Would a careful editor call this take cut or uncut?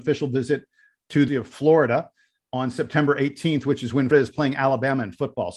cut